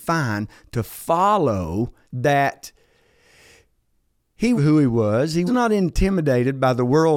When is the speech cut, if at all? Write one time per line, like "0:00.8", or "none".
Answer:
0:02.0
0:04.6
0:05.5